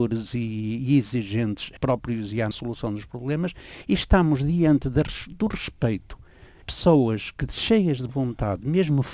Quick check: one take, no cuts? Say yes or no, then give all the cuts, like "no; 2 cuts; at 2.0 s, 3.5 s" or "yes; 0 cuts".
no; 4 cuts; at 1.8 s, 2.5 s, 6.6 s, 8.1 s